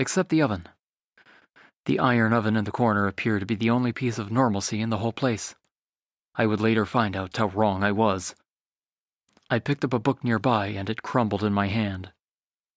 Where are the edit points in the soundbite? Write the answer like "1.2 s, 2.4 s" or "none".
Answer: 7.3 s

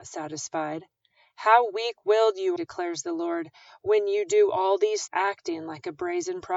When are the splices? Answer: 2.6 s, 5.1 s

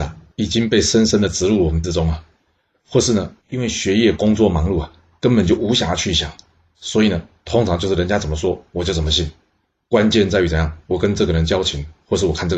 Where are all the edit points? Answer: 1.8 s

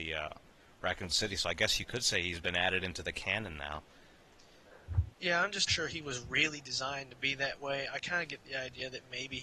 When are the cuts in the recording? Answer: 5.1 s, 5.7 s

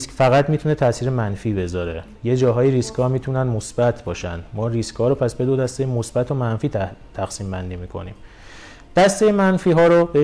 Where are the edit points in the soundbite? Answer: 2.1 s

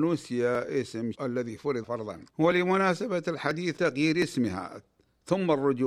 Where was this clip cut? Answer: 1.1 s, 1.8 s, 2.3 s, 3.8 s

